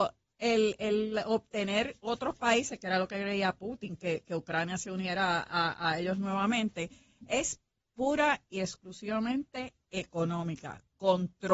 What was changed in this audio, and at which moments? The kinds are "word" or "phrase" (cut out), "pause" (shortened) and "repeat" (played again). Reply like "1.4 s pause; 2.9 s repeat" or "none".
none